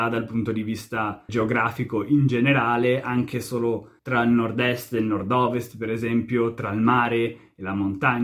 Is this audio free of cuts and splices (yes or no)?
no